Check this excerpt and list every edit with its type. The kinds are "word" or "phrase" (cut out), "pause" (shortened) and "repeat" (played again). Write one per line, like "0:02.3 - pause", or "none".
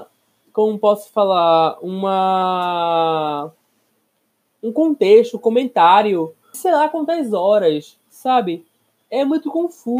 0:06.5 - phrase

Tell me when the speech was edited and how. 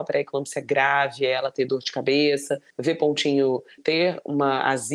0:02.7 - pause
0:03.8 - word

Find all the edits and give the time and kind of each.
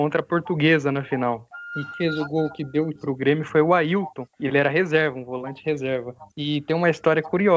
0:01.9 - word
0:03.0 - word
0:04.3 - pause
0:06.3 - pause

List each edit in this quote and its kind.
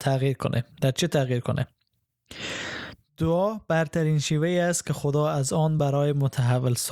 none

